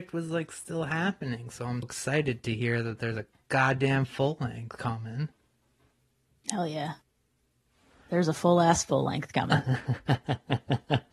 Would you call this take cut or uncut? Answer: cut